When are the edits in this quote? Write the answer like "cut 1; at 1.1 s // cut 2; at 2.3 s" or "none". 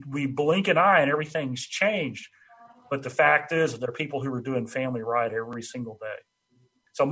none